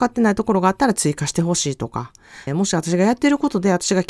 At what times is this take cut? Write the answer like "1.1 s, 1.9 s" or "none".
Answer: 2.5 s